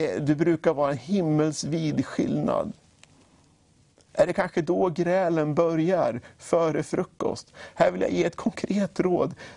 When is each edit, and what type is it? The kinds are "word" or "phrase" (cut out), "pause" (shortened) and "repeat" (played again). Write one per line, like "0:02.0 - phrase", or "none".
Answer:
none